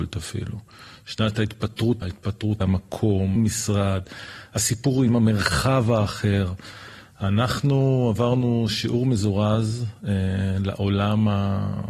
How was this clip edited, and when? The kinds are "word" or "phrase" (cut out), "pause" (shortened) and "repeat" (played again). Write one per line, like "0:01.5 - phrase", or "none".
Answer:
0:02.0 - word
0:02.6 - phrase
0:03.4 - phrase